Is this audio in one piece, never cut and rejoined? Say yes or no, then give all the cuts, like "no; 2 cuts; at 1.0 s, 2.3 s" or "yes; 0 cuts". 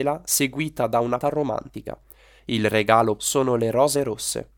no; 2 cuts; at 1.2 s, 3.2 s